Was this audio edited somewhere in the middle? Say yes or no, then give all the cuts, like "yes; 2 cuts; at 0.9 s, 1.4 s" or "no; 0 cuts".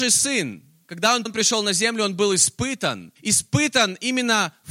yes; 2 cuts; at 1.3 s, 3.2 s